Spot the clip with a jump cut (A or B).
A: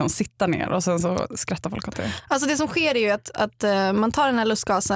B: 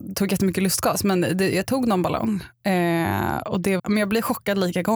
B